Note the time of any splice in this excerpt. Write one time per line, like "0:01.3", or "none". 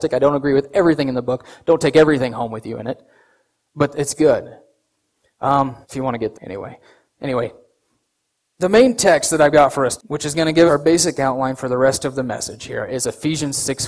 0:05.8
0:06.3
0:10.0
0:10.7